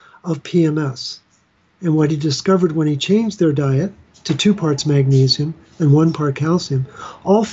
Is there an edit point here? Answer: no; 0 cuts

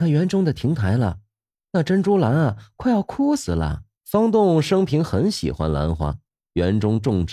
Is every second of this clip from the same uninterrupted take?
no; 1 cut; at 4.0 s

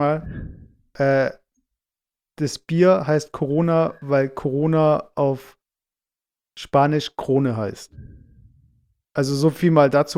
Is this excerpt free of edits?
yes; 0 cuts

